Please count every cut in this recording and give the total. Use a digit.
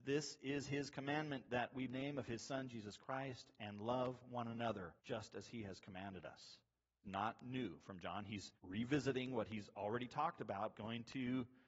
5